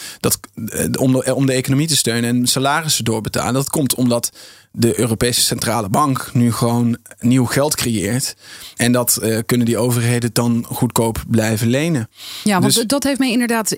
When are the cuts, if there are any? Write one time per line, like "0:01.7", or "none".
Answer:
none